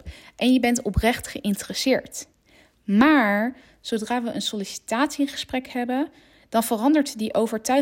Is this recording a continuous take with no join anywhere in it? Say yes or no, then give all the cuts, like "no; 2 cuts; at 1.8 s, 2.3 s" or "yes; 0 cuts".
yes; 0 cuts